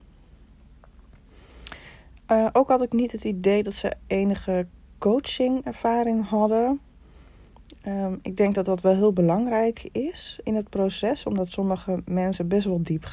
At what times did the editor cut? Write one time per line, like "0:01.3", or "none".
0:10.4